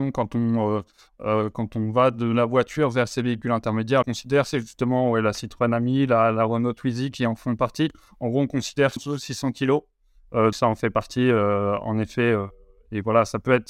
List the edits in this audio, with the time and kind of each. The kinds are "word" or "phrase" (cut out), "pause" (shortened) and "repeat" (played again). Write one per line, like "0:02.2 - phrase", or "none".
0:04.0 - phrase
0:09.0 - phrase
0:10.5 - word